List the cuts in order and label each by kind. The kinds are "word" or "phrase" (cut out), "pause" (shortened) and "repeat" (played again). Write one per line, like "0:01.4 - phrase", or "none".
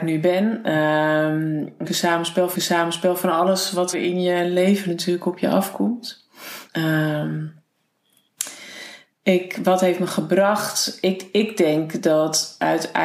0:01.8 - phrase
0:02.5 - repeat
0:03.9 - word
0:06.7 - pause